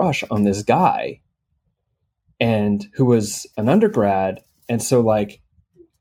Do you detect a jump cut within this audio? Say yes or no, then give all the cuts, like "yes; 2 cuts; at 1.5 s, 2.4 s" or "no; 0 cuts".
no; 0 cuts